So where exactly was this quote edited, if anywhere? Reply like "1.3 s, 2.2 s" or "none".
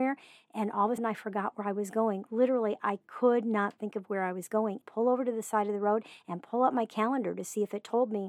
1.0 s, 4.8 s